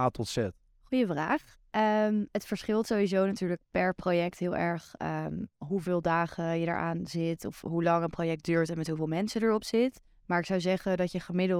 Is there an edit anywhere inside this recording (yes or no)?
yes